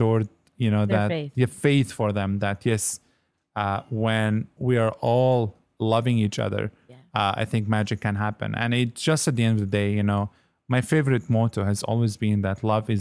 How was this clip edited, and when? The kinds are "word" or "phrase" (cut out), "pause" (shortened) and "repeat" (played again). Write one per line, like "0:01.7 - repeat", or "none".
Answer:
none